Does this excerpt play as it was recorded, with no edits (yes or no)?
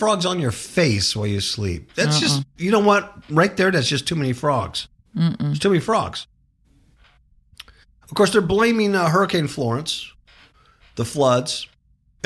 yes